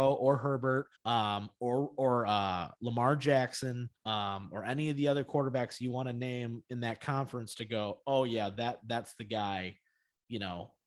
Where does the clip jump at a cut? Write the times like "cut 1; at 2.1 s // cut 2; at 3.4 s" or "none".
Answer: cut 1; at 1.0 s // cut 2; at 4.0 s